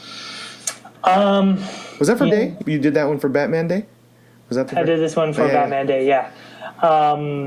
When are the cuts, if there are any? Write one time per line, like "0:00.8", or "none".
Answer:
0:02.3
0:02.6
0:04.7